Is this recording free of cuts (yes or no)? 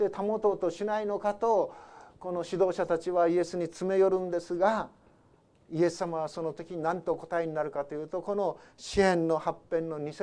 yes